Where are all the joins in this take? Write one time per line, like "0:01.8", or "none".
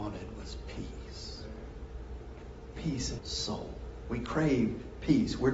0:03.2